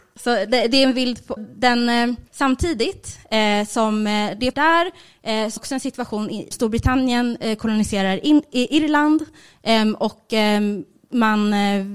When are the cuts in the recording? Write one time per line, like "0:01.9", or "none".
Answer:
0:01.4
0:02.3
0:04.5
0:05.6
0:06.5